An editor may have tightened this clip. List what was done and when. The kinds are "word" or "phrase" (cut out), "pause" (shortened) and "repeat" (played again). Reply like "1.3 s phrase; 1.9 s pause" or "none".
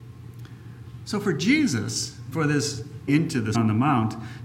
2.3 s word; 3.1 s word; 3.5 s word